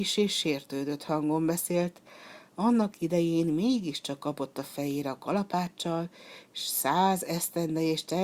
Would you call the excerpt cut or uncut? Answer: uncut